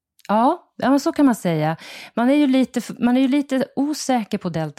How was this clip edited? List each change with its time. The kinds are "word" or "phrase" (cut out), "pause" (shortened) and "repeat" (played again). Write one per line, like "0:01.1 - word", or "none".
none